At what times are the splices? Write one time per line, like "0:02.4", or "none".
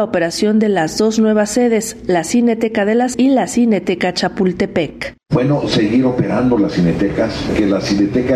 0:03.1
0:05.2